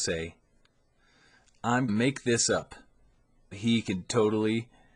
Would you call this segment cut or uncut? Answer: cut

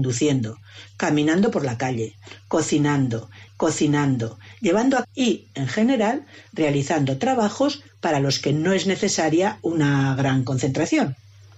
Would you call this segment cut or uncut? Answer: cut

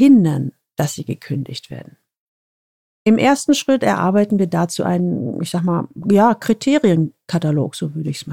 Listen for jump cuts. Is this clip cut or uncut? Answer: uncut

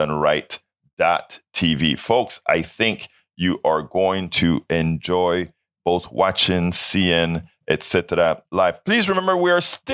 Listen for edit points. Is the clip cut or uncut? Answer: uncut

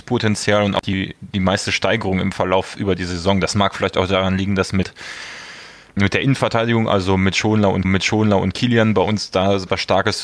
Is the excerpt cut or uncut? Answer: cut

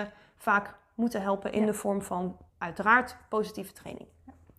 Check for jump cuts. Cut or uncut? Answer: cut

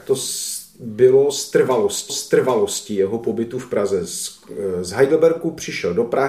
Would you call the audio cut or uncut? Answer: cut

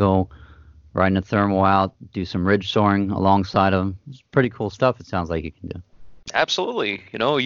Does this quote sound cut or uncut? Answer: uncut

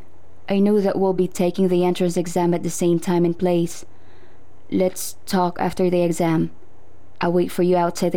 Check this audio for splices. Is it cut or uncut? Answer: uncut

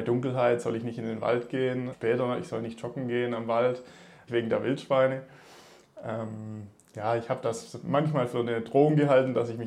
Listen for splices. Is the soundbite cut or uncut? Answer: cut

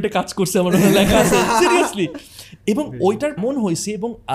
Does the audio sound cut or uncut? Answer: cut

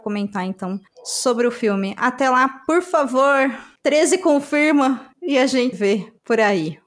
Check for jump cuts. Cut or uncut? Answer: cut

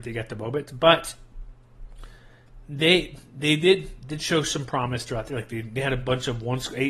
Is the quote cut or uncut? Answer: uncut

